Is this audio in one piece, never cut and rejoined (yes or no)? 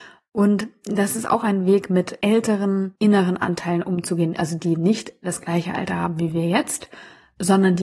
yes